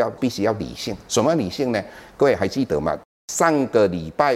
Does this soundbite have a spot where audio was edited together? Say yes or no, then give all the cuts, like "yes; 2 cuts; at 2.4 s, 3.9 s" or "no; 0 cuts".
no; 0 cuts